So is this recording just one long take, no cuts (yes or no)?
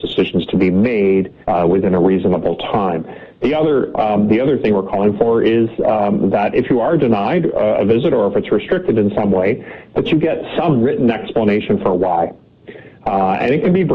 no